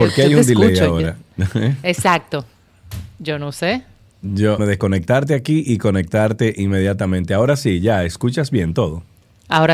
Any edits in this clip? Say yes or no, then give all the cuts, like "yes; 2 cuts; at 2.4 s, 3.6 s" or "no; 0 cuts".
yes; 1 cut; at 4.6 s